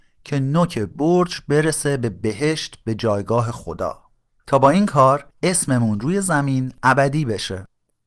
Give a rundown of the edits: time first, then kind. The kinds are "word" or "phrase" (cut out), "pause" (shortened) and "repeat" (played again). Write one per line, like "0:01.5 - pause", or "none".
0:04.3 - pause
0:05.3 - pause